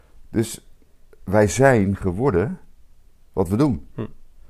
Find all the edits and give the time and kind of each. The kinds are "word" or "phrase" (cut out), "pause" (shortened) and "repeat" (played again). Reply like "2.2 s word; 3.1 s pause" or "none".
none